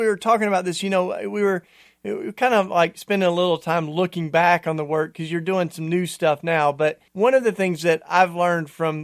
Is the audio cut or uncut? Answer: cut